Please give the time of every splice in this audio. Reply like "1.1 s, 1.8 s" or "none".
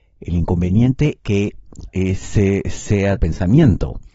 1.2 s, 1.9 s, 3.2 s